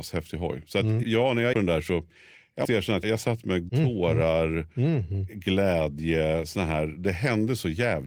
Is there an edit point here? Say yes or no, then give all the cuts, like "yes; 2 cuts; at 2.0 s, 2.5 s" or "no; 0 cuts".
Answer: yes; 5 cuts; at 1.0 s, 1.5 s, 2.6 s, 3.0 s, 3.7 s